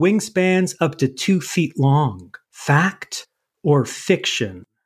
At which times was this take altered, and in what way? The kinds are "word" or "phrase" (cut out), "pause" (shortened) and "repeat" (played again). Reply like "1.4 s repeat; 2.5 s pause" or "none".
2.4 s pause